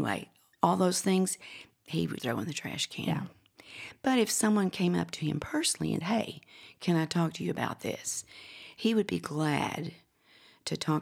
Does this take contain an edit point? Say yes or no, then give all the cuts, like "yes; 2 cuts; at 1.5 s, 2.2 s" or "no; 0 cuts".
yes; 2 cuts; at 2.2 s, 6.0 s